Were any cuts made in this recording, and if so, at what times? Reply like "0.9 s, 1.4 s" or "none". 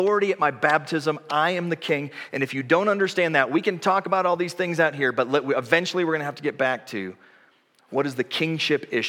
none